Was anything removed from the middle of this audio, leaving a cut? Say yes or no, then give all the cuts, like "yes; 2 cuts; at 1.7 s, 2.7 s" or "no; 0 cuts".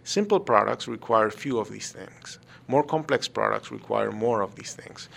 no; 0 cuts